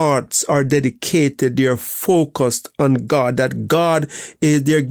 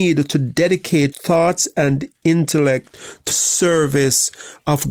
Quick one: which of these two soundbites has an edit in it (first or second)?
second